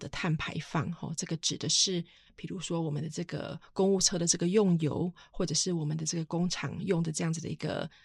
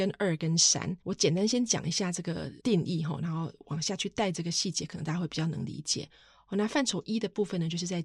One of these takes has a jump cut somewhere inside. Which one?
second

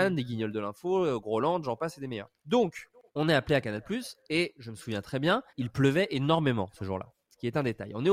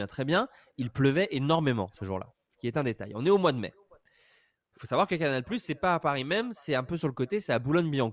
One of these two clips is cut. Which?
first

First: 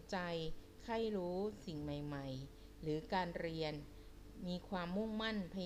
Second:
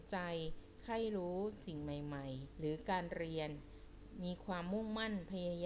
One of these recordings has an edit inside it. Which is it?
second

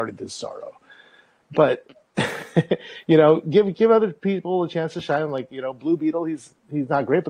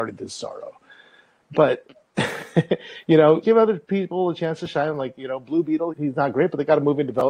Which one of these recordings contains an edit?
second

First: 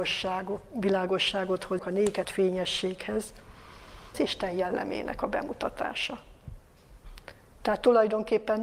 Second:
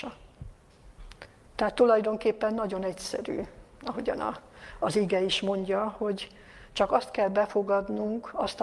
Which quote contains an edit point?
first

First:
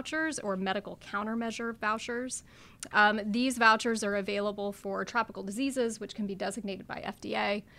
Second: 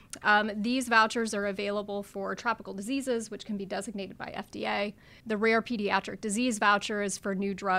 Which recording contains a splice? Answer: second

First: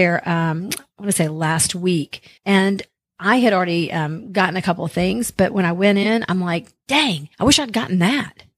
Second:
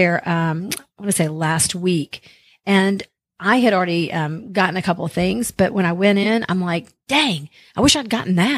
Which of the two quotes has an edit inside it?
first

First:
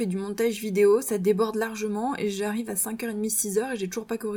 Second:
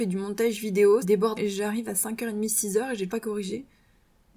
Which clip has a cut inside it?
second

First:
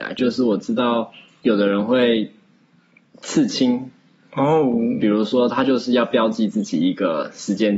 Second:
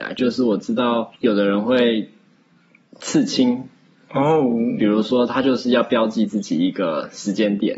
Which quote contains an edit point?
second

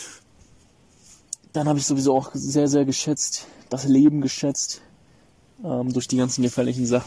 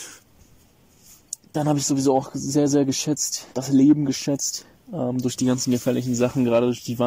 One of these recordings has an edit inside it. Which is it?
second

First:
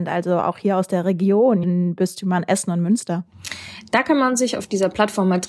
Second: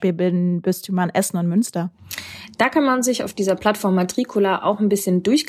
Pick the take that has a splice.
first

